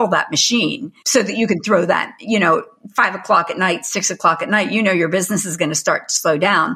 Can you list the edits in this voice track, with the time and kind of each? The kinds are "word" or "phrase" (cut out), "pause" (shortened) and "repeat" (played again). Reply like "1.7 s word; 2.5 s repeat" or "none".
none